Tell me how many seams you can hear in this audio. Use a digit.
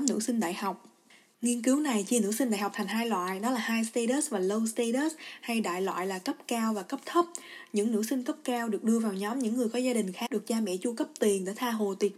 1